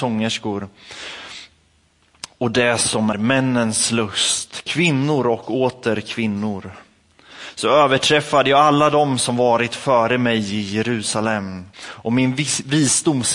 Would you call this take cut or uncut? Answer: cut